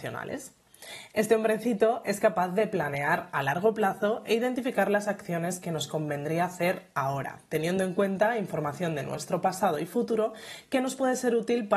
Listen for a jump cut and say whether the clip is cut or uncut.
uncut